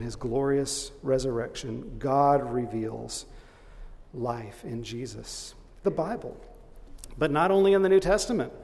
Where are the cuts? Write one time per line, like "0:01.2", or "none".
0:05.8